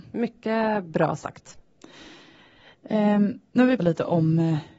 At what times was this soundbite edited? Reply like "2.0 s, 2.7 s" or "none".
3.8 s